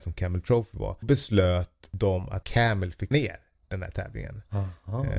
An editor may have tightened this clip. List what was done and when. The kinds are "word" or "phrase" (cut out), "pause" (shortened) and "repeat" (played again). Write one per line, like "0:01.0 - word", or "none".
0:01.0 - word
0:02.4 - word
0:03.1 - word